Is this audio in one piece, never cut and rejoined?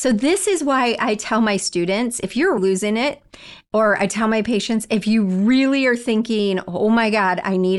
no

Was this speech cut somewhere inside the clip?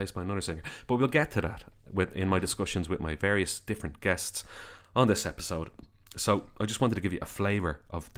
no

